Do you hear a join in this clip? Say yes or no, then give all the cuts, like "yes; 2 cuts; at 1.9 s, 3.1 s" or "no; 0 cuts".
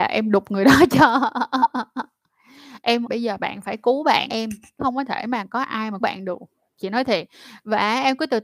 yes; 4 cuts; at 3.1 s, 4.3 s, 4.8 s, 6.0 s